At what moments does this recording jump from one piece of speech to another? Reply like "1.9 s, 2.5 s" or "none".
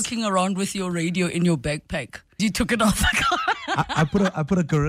2.4 s